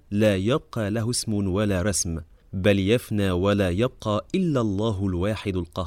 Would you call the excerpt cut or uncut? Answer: uncut